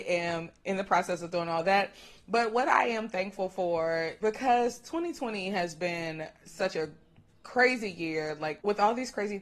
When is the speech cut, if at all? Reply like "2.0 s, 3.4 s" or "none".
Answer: none